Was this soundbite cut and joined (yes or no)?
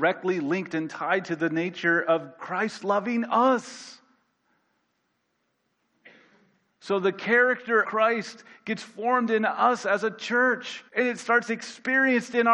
yes